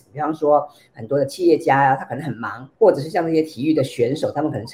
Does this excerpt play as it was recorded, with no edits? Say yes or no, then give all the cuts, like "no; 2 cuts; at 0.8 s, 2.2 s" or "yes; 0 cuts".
no; 1 cut; at 2.7 s